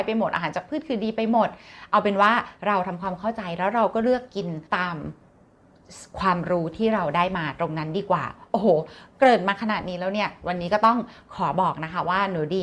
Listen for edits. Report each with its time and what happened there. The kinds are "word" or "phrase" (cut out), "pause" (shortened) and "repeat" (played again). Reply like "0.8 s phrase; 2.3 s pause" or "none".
4.7 s pause